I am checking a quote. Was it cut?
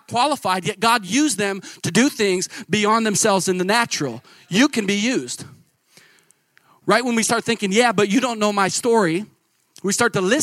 no; 0 cuts

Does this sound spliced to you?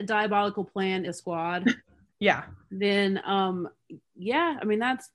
yes; 3 cuts; at 1.0 s, 1.8 s, 2.6 s

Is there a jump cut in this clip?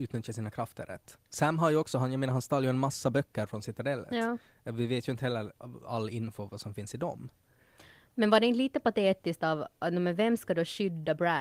no; 0 cuts

